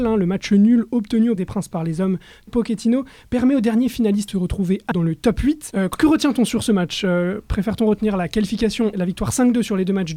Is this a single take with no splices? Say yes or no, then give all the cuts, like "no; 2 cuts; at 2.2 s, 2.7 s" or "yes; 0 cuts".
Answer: no; 5 cuts; at 1.4 s, 2.5 s, 4.3 s, 4.9 s, 8.9 s